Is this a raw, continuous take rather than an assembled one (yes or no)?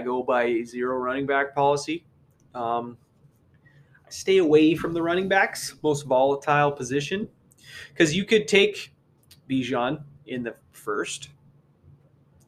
yes